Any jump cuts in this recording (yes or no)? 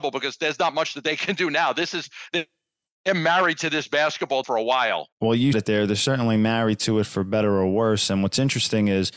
yes